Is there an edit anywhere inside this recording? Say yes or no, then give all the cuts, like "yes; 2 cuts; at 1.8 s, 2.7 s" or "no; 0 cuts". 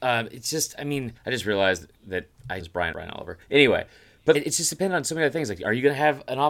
yes; 6 cuts; at 1.2 s, 2.0 s, 2.6 s, 2.9 s, 3.4 s, 4.3 s